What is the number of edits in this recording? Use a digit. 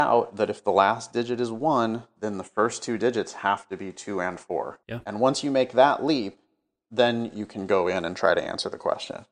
1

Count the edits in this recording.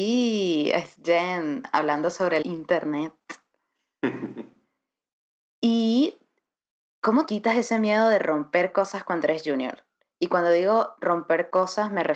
2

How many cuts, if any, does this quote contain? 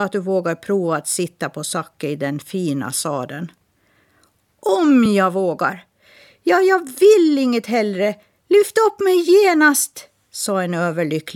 0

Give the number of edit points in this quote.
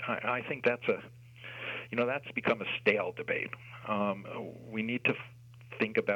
0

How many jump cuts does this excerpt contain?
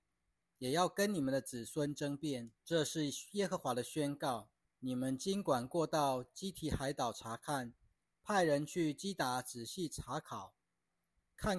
3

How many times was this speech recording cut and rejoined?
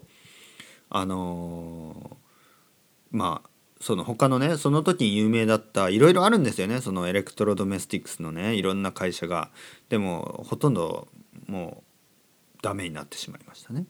0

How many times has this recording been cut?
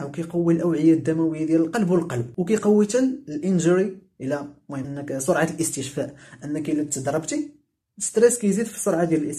1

